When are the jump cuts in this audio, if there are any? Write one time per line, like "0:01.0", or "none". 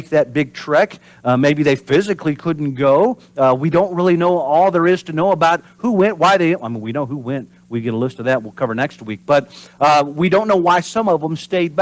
none